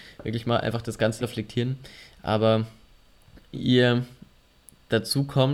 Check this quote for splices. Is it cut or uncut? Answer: cut